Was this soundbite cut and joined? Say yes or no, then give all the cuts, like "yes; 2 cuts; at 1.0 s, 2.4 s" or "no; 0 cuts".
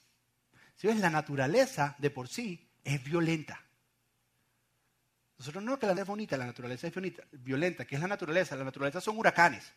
yes; 2 cuts; at 2.7 s, 5.9 s